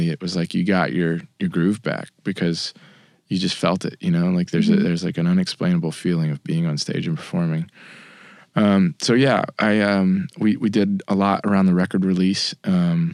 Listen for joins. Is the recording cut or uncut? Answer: uncut